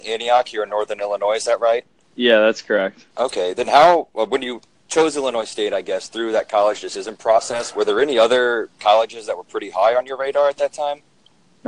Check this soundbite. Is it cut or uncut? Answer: cut